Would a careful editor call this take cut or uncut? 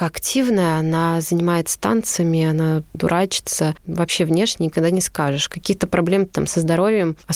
cut